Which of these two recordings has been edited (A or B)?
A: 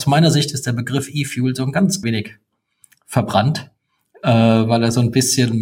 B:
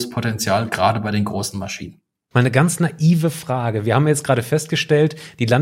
A